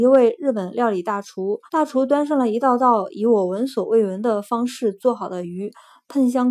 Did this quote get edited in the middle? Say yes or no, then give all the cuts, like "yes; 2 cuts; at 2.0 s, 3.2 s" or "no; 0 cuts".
yes; 1 cut; at 1.7 s